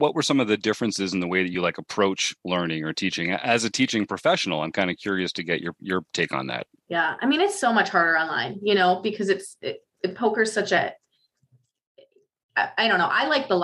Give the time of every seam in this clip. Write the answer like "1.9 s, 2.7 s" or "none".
none